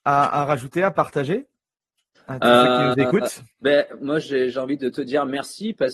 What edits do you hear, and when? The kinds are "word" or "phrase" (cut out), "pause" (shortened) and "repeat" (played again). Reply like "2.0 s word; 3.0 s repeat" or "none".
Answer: 3.5 s pause